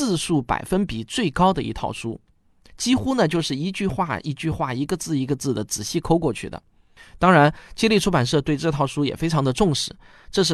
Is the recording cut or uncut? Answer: uncut